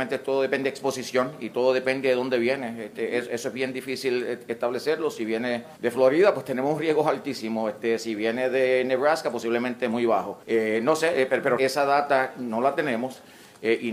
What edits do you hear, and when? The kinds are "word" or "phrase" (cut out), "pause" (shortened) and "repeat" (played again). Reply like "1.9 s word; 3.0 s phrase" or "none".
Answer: 5.8 s pause; 10.4 s pause; 11.6 s word